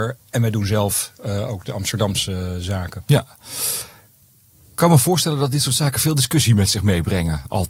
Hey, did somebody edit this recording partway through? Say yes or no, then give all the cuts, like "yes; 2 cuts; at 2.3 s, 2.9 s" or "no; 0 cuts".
no; 0 cuts